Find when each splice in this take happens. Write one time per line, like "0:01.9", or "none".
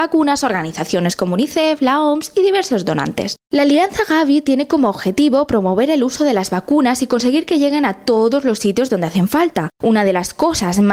0:09.7